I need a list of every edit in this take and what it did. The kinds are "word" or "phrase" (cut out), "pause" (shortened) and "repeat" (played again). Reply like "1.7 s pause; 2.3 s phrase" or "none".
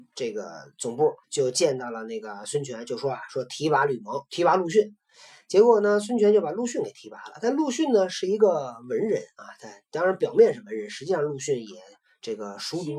1.2 s pause; 4.3 s word

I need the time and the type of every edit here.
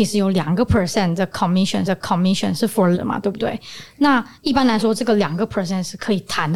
1.8 s repeat; 2.9 s word

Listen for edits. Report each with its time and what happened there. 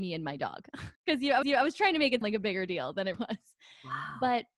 0.9 s pause; 1.4 s repeat; 2.2 s word; 3.1 s word

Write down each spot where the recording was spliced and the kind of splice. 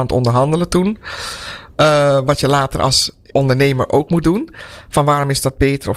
3.3 s word; 4.1 s word

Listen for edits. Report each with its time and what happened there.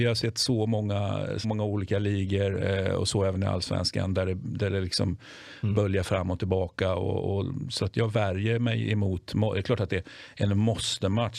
1.4 s phrase

